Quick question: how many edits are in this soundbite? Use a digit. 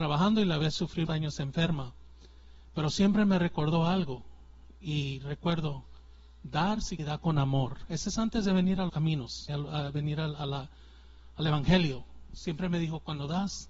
4